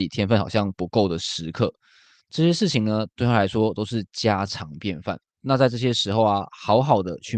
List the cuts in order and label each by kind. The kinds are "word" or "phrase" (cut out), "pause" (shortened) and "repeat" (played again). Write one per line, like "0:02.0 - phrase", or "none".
0:05.3 - pause